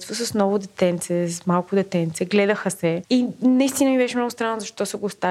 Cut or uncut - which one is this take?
uncut